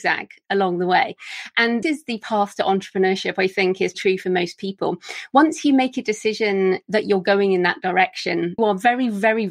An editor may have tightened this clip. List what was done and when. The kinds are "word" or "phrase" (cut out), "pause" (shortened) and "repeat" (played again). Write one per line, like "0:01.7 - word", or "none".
0:01.8 - word
0:03.9 - word
0:08.6 - word